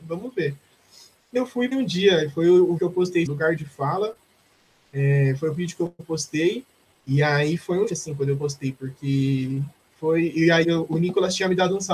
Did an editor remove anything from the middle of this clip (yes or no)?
yes